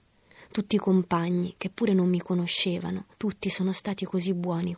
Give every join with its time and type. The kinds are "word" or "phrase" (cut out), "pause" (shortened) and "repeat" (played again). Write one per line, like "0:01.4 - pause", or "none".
0:03.1 - pause